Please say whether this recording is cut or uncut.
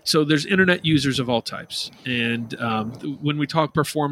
uncut